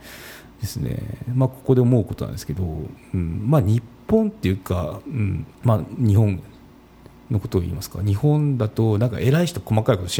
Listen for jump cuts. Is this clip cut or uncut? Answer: cut